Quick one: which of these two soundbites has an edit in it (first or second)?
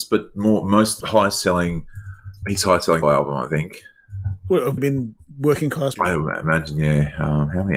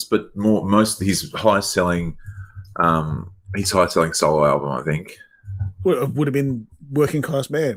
first